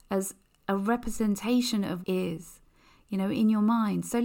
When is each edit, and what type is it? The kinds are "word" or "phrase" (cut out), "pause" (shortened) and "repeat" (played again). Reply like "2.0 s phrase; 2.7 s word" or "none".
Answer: 2.0 s phrase